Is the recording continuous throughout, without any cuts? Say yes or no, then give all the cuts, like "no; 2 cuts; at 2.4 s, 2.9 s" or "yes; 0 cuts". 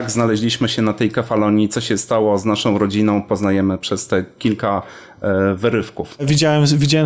yes; 0 cuts